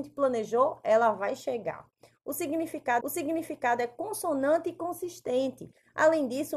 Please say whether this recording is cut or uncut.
cut